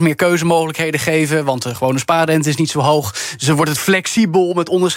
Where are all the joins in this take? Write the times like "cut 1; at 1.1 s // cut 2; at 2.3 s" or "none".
none